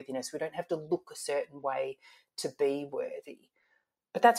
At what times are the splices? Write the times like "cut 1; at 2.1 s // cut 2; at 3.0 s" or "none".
none